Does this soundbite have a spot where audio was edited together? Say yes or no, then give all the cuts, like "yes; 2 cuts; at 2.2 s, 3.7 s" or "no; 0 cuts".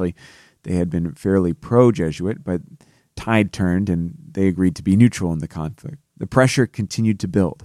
no; 0 cuts